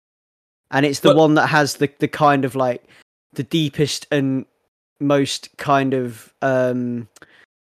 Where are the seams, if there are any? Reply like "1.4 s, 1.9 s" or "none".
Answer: none